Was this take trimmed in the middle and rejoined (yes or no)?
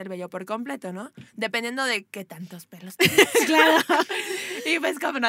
yes